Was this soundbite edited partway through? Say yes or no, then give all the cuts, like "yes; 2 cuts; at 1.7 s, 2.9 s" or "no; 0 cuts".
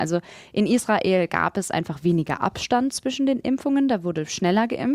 no; 0 cuts